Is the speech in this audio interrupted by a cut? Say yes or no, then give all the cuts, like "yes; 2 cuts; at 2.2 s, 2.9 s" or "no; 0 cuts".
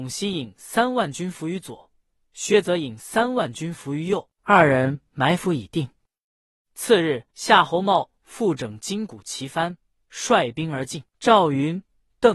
yes; 3 cuts; at 4.4 s, 7.3 s, 11.1 s